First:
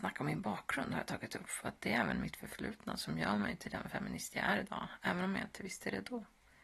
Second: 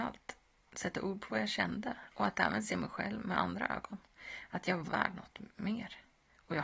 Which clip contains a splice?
second; 1 cut; at 4.8 s

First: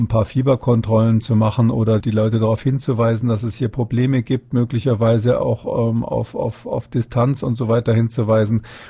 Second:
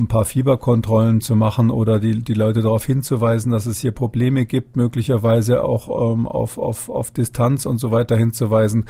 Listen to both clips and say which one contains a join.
first; 1 cut; at 2.0 s

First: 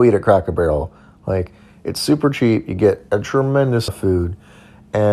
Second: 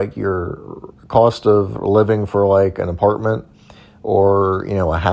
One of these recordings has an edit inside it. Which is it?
first; 1 cut; at 3.9 s

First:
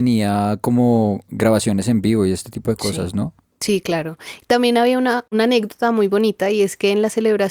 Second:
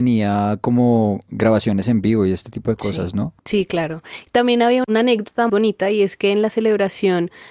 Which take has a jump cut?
second; 3 cuts; at 3.4 s, 4.8 s, 5.5 s

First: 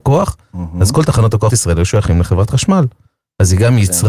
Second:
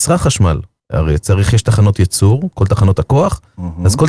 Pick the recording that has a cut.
first; 1 cut; at 1.5 s

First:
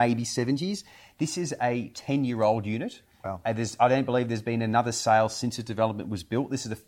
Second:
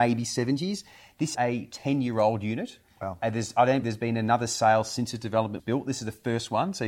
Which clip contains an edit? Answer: second; 3 cuts; at 1.3 s, 3.8 s, 5.6 s

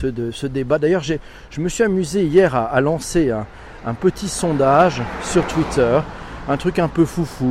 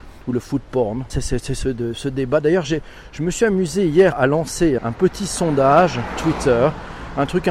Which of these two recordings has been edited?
second; 4 cuts; at 1.1 s, 4.1 s, 4.8 s, 6.2 s

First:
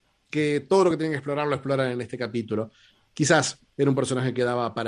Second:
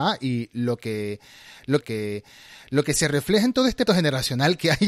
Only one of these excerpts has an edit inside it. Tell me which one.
second; 2 cuts; at 1.8 s, 3.9 s

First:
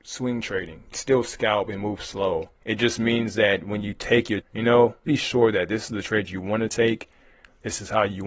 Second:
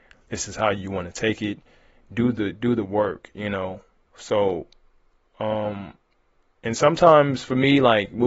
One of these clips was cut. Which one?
first; 4 cuts; at 0.9 s, 2.6 s, 4.4 s, 5.0 s

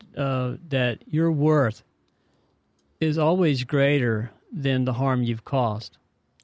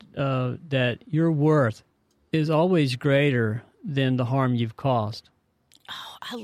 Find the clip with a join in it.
second; 1 cut; at 1.9 s

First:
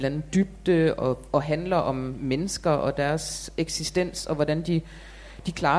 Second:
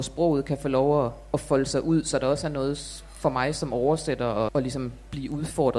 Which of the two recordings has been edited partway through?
second; 1 cut; at 4.5 s

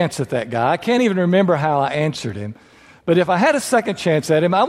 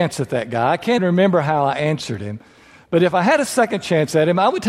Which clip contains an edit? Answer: second; 1 cut; at 1.0 s

